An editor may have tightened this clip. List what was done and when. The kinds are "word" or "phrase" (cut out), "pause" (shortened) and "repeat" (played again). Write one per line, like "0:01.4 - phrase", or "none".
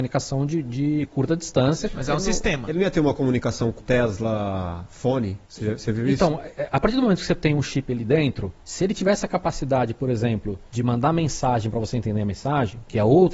0:03.8 - word
0:05.4 - pause
0:08.6 - pause
0:10.7 - pause

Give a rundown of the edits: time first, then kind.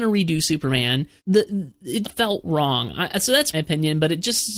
0:01.2 - pause
0:02.0 - word
0:03.5 - phrase

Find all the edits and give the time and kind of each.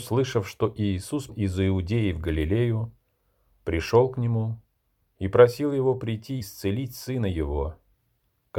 0:01.3 - word
0:06.4 - word

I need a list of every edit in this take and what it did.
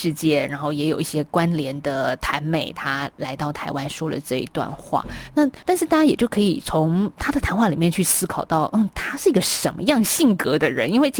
0:05.6 - pause

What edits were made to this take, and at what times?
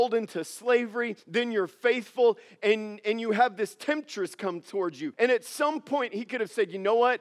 0:01.2 - pause
0:05.1 - pause

